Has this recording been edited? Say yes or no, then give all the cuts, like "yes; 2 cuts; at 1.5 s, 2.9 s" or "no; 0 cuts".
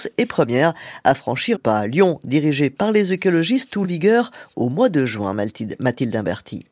yes; 2 cuts; at 1.5 s, 3.8 s